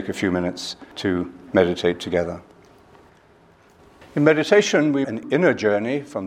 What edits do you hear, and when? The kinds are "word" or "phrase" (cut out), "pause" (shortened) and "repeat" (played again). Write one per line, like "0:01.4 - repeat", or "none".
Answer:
0:05.0 - word